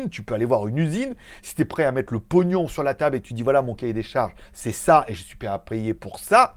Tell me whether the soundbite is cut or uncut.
uncut